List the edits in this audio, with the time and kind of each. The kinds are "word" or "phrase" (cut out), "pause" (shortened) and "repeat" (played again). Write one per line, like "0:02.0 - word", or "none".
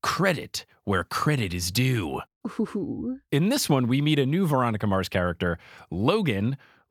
none